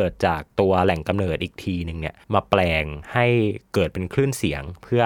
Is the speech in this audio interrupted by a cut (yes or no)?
yes